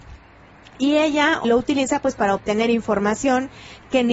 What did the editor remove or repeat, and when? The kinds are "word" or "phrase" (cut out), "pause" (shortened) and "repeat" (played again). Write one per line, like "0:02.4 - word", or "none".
0:01.4 - word